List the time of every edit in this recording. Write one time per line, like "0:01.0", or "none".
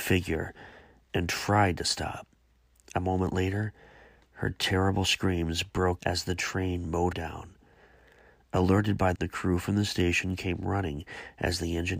0:06.0
0:07.1
0:09.2